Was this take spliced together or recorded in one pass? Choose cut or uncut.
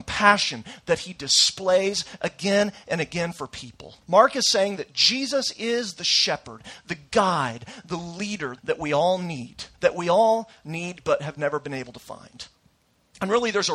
cut